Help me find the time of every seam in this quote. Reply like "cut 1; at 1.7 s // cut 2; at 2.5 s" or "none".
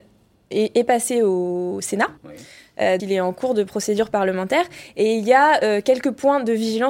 cut 1; at 2.2 s // cut 2; at 3.0 s